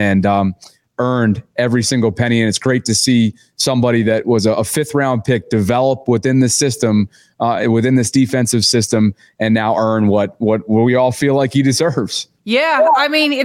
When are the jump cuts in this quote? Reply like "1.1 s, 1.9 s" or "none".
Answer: none